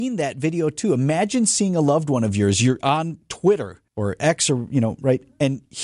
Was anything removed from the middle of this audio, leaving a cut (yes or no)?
yes